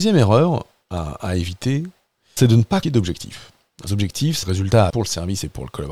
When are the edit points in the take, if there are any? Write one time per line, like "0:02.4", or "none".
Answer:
0:02.4
0:02.8
0:03.9
0:04.4
0:04.9

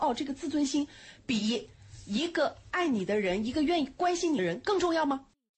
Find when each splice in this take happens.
none

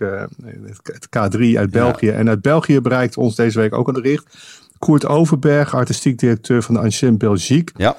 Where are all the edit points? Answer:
0:03.9

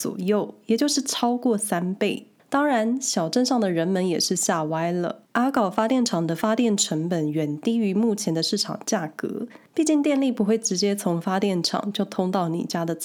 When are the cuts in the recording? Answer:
0:05.3

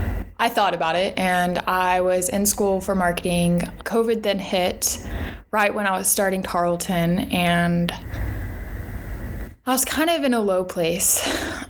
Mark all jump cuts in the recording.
0:03.8

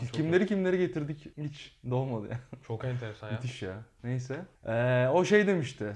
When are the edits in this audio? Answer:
0:01.3
0:04.6

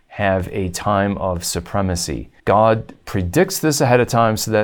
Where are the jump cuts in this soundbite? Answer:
0:02.4

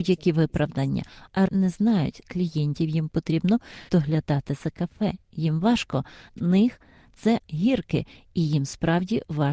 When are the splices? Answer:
0:01.5
0:02.2
0:03.9
0:06.3
0:07.4

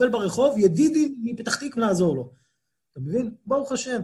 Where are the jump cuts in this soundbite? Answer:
0:01.8

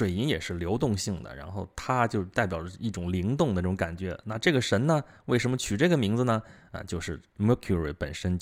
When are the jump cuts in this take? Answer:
none

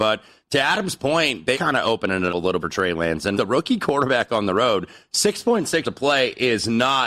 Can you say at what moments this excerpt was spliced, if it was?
0:01.5
0:02.3
0:02.6
0:03.3
0:05.8

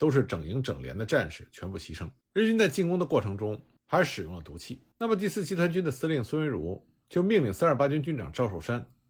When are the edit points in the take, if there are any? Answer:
0:02.2
0:04.9

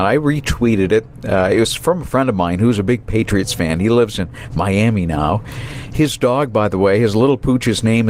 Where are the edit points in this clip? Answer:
none

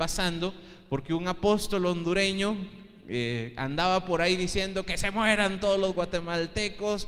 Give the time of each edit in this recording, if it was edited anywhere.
none

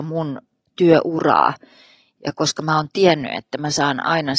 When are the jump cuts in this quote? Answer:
none

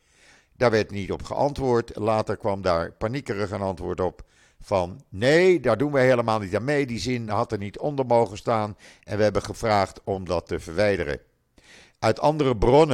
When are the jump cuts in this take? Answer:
none

